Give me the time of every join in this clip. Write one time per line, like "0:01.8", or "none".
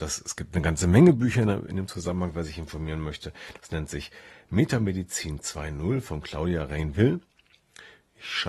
none